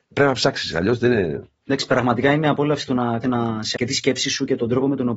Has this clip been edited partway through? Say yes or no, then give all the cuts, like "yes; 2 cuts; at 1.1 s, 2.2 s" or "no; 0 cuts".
yes; 2 cuts; at 3.2 s, 3.7 s